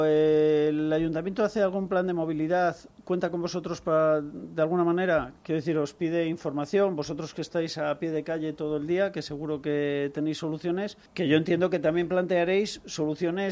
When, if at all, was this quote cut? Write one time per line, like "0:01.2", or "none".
0:05.4
0:11.1